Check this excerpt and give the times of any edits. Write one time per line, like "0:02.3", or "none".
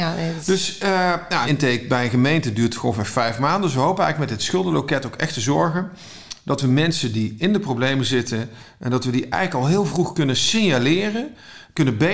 0:01.4